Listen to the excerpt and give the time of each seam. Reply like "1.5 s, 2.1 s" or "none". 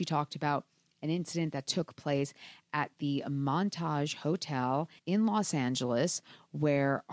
5.0 s